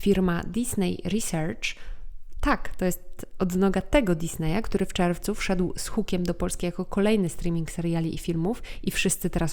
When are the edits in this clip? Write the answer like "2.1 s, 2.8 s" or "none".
none